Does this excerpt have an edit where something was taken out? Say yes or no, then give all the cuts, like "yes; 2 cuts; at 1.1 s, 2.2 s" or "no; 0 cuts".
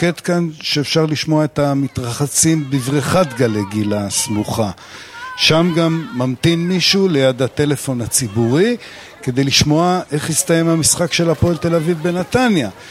no; 0 cuts